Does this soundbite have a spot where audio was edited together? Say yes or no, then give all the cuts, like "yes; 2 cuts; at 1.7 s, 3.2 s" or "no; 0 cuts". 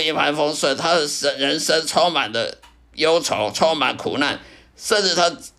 no; 0 cuts